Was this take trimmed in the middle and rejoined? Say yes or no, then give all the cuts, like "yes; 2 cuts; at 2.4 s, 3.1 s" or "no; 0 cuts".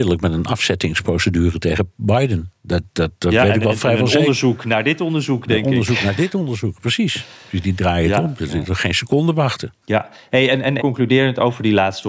yes; 3 cuts; at 2.6 s, 9.8 s, 10.8 s